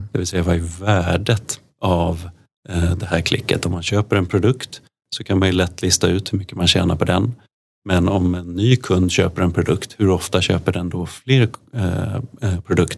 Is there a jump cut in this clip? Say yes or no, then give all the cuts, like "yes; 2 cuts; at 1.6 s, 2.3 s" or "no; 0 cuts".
no; 0 cuts